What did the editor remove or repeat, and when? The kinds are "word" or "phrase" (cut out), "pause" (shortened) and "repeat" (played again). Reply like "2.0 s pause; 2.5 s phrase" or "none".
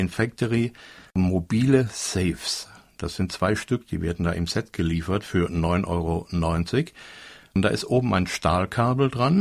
none